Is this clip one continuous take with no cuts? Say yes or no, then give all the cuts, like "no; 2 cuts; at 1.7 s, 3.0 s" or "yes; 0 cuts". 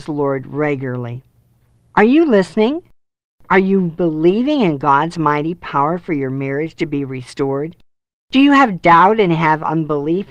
yes; 0 cuts